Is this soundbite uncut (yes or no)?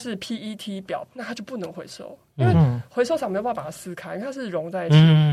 no